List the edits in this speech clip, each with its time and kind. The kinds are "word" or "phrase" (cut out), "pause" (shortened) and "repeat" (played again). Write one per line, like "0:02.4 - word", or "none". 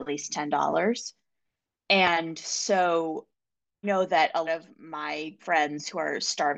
0:03.8 - word
0:04.5 - word
0:05.4 - word